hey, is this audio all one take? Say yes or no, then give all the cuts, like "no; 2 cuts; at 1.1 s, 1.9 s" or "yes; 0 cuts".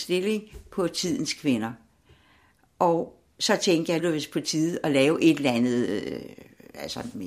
no; 1 cut; at 4.0 s